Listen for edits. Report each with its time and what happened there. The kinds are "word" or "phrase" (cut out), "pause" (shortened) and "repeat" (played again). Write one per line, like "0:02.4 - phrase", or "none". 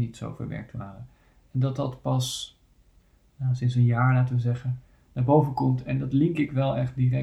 none